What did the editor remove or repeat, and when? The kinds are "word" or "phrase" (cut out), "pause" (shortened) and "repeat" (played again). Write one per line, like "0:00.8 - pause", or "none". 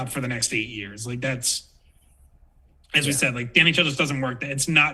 none